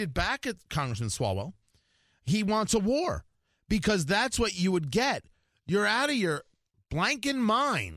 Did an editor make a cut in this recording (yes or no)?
no